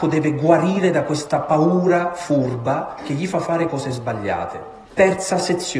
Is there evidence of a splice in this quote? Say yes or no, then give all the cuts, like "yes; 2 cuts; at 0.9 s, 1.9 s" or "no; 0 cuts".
yes; 1 cut; at 4.9 s